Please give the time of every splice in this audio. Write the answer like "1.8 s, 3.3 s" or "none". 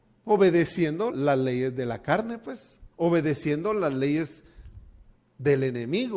1.1 s, 2.9 s